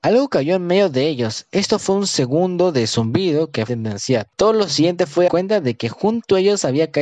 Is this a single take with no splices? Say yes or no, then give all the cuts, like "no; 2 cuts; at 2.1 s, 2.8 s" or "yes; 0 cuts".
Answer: no; 3 cuts; at 3.7 s, 4.3 s, 5.3 s